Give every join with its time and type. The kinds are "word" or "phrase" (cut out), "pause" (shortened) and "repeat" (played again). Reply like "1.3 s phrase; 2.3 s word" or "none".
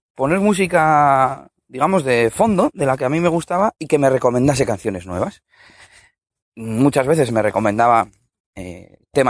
none